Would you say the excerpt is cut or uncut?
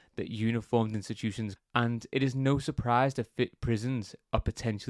cut